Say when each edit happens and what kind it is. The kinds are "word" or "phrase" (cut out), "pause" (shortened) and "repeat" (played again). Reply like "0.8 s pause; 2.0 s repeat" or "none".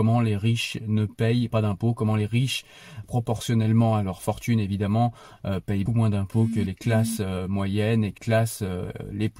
1.5 s word; 3.0 s word; 5.9 s word; 8.2 s word